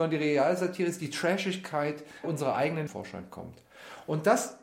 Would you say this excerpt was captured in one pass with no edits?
no; 2 cuts; at 2.2 s, 2.9 s

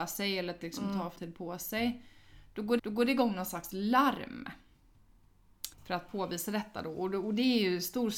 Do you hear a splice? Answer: yes; 3 cuts; at 1.2 s, 2.8 s, 5.7 s

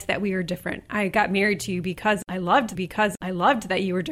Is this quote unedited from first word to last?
no; 1 cut; at 2.7 s

